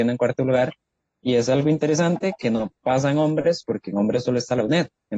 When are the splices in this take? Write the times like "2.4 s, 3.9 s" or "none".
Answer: none